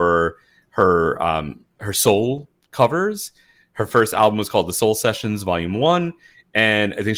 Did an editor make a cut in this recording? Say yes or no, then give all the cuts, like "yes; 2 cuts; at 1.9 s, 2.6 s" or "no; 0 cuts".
no; 0 cuts